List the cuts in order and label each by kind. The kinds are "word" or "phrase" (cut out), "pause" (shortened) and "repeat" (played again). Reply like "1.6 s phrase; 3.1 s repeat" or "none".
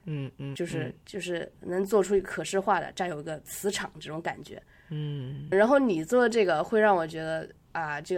5.5 s word